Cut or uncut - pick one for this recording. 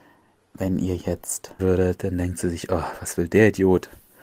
cut